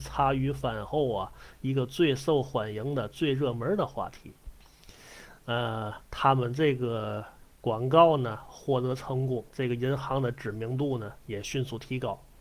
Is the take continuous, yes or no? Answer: no